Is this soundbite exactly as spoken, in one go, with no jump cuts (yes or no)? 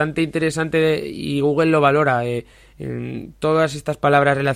yes